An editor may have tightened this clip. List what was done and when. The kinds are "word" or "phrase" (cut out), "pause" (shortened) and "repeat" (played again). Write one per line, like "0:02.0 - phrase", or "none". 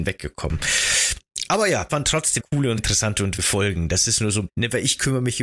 0:01.9 - word
0:02.4 - word
0:02.8 - word
0:03.4 - word
0:04.5 - word

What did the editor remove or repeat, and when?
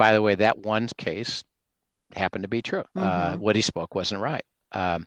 0:00.9 - word
0:02.9 - pause

